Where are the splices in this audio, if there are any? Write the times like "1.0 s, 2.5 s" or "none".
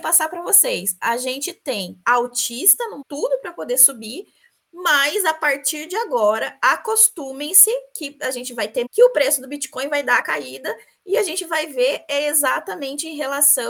2.0 s, 3.0 s, 8.9 s, 10.2 s